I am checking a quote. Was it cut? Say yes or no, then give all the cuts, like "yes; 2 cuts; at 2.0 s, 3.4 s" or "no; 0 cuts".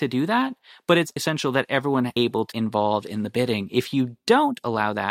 yes; 3 cuts; at 1.2 s, 2.2 s, 2.5 s